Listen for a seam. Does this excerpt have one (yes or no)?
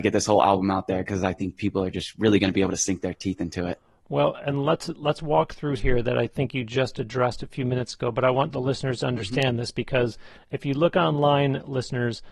yes